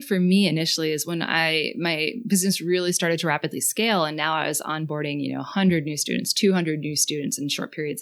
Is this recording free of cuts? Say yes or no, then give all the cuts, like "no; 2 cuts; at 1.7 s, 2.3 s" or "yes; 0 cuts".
yes; 0 cuts